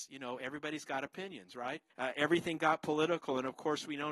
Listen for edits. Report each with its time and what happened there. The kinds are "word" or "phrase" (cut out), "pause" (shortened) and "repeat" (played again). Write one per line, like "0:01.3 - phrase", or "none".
0:01.9 - pause

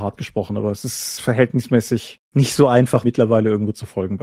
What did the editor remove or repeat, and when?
0:03.0 - word

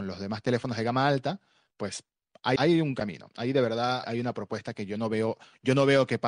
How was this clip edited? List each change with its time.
0:02.6 - word
0:04.0 - word

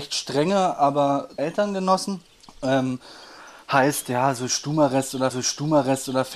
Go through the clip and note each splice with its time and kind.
0:01.4 - phrase
0:02.3 - pause
0:05.3 - repeat

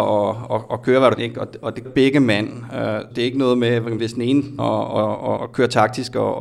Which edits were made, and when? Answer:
0:01.2 - word
0:01.8 - word
0:03.1 - word
0:04.0 - word
0:04.6 - word
0:05.4 - word

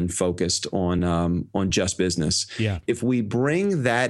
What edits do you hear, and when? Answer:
none

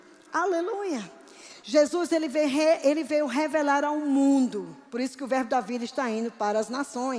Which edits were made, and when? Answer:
0:04.9 - pause

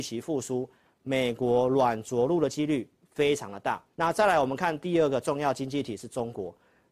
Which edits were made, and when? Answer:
0:03.9 - pause

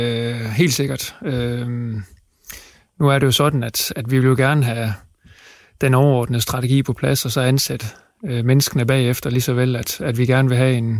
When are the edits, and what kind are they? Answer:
none

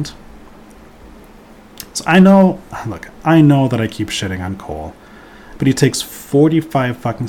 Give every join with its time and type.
none

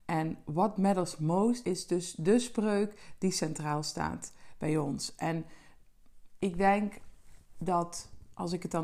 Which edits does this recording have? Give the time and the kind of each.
0:01.6 - word

